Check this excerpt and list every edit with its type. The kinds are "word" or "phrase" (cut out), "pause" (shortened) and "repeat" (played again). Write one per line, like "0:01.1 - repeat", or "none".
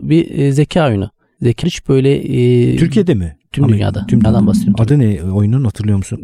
0:01.6 - word
0:04.2 - word

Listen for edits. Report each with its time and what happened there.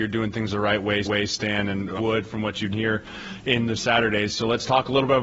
0:01.0 - repeat
0:02.0 - phrase
0:02.7 - word
0:03.8 - phrase

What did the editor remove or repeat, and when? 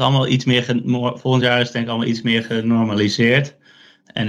none

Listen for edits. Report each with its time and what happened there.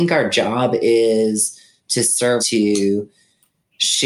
0:02.4 - phrase

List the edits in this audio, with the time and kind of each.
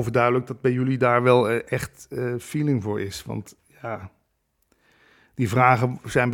none

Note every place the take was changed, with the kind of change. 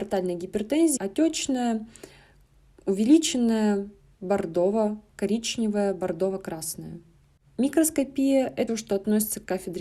0:01.0 - word
0:08.7 - word

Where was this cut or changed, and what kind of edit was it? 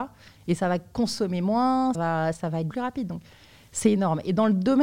0:01.9 - word
0:02.3 - word
0:02.7 - word

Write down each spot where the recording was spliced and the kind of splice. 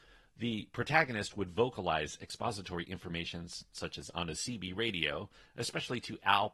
none

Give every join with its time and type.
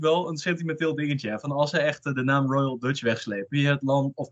none

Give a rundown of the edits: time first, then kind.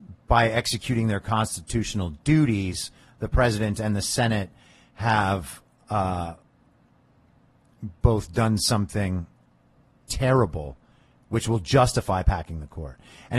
none

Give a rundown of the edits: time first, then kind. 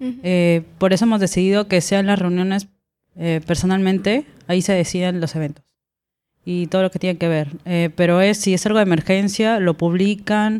none

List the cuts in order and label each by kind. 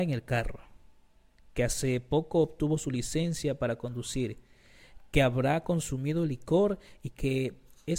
none

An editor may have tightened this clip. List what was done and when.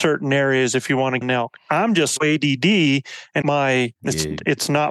0:01.2 - word
0:02.2 - word
0:03.4 - phrase
0:04.0 - pause

